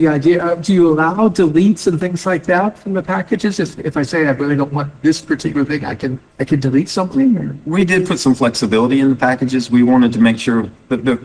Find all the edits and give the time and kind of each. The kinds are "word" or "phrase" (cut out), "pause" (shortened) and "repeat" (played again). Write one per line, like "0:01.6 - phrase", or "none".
0:06.3 - pause